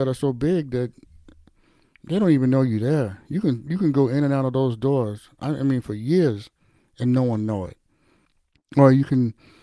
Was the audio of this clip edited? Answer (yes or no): yes